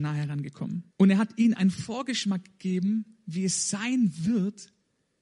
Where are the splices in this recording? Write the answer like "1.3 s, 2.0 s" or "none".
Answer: 0.9 s

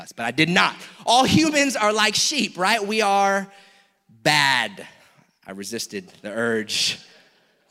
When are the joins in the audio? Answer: none

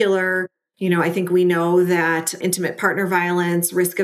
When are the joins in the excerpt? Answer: 2.4 s

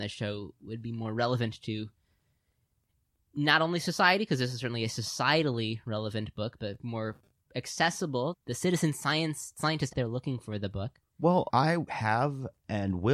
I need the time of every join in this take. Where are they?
6.6 s, 8.3 s, 9.9 s, 11.5 s, 11.9 s

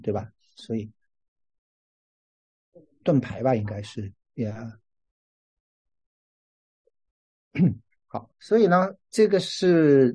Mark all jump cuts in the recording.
3.0 s, 4.2 s, 8.3 s

